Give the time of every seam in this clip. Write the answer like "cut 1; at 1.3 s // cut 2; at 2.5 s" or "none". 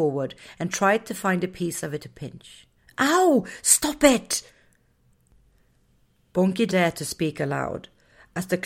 cut 1; at 2.0 s // cut 2; at 2.8 s // cut 3; at 6.7 s